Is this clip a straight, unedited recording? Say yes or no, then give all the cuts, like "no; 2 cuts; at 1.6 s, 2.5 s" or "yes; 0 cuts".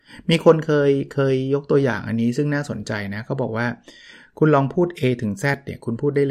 yes; 0 cuts